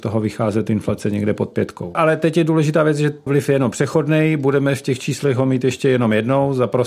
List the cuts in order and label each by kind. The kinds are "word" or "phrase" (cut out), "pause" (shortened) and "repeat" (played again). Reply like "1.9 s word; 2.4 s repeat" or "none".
3.3 s word